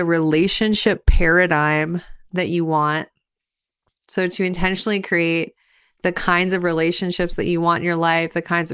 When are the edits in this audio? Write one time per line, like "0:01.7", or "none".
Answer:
none